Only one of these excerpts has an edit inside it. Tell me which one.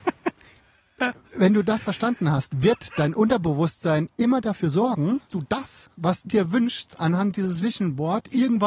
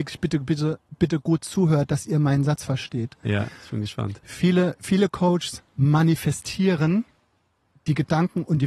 first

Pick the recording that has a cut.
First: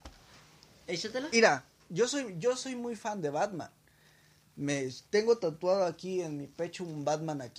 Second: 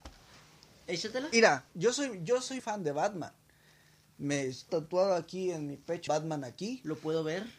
second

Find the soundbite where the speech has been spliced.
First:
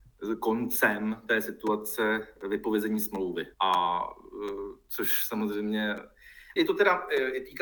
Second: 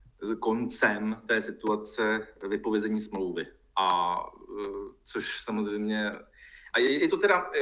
first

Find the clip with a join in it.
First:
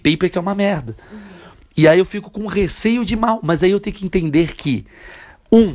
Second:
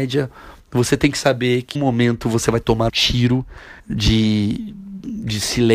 second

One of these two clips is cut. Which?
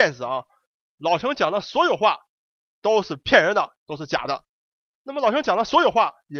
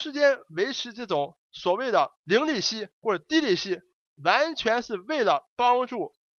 second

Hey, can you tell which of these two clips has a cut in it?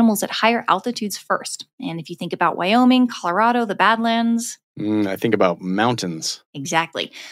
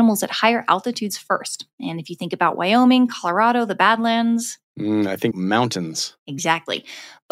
second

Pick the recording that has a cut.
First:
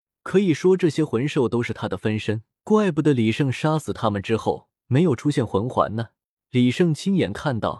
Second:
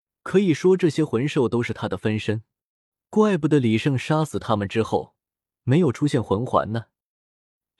first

